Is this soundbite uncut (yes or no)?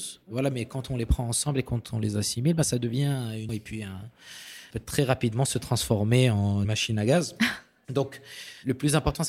no